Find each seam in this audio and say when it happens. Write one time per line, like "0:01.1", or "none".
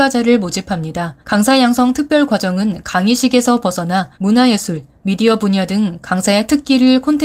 0:01.2
0:04.1